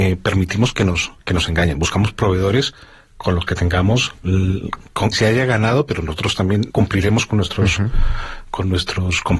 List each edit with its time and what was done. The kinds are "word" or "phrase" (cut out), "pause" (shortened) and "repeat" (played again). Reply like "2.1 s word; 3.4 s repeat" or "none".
5.1 s word; 6.7 s word